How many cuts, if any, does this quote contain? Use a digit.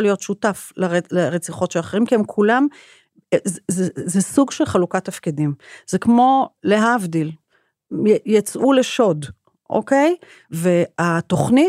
0